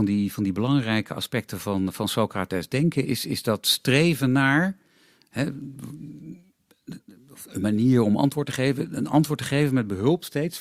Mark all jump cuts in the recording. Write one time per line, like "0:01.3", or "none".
0:03.0